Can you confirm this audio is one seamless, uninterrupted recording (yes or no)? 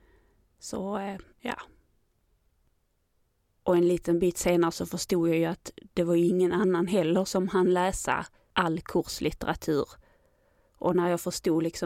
no